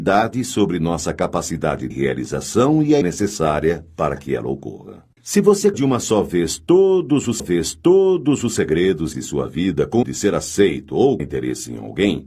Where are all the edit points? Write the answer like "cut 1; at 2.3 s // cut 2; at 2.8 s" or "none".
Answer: cut 1; at 1.9 s // cut 2; at 3.0 s // cut 3; at 5.2 s // cut 4; at 5.7 s // cut 5; at 7.4 s // cut 6; at 9.1 s // cut 7; at 10.0 s // cut 8; at 11.2 s